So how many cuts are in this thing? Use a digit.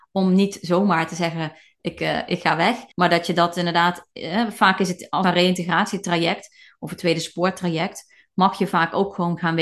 2